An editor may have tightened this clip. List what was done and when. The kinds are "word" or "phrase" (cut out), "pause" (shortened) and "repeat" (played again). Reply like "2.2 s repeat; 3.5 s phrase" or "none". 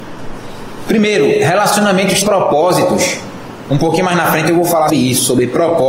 2.2 s word; 4.9 s word